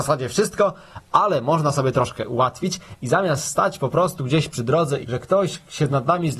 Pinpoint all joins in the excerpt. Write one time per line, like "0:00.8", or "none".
0:05.0

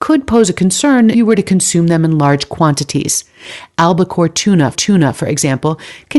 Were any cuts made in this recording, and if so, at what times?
0:01.1
0:04.7

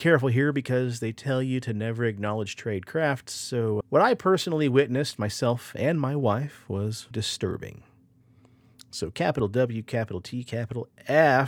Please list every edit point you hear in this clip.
0:03.8
0:07.1

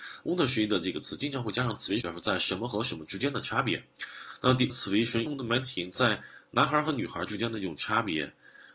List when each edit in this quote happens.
0:02.0
0:04.7
0:05.3

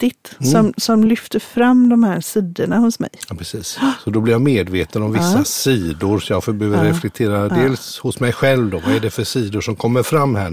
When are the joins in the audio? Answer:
none

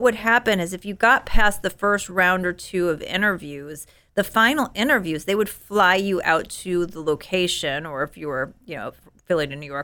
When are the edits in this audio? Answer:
none

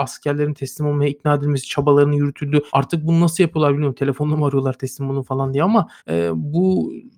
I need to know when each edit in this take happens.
0:02.7
0:06.0

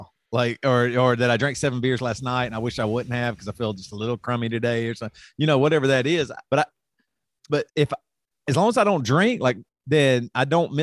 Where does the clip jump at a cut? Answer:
0:06.5
0:07.7
0:09.7

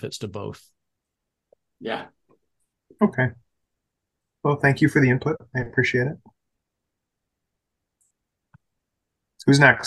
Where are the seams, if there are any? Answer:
none

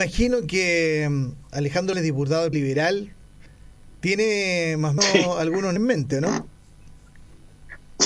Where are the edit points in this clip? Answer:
0:01.9
0:02.5
0:05.0
0:05.8

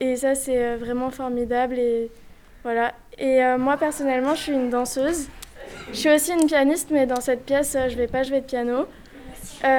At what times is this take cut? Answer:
none

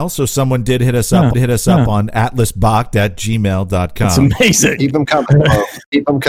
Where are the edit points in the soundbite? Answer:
0:01.3

